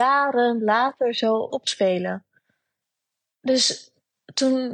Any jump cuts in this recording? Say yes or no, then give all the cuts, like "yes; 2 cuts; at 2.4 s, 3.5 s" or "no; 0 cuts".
yes; 1 cut; at 1.5 s